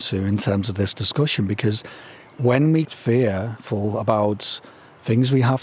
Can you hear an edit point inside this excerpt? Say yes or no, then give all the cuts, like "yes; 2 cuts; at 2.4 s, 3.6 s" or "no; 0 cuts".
yes; 1 cut; at 2.8 s